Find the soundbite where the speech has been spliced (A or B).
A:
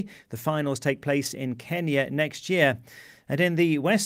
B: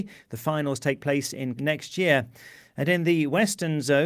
B